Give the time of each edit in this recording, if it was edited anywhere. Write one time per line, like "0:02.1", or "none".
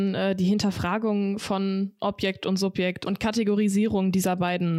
none